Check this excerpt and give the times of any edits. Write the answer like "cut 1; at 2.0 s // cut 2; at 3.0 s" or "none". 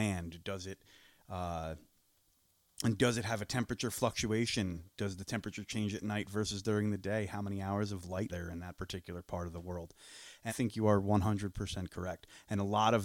cut 1; at 8.3 s // cut 2; at 10.5 s